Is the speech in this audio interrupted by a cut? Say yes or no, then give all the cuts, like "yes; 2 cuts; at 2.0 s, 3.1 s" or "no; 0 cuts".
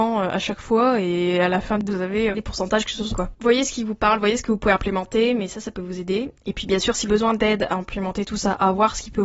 yes; 4 cuts; at 1.9 s, 2.3 s, 3.1 s, 7.1 s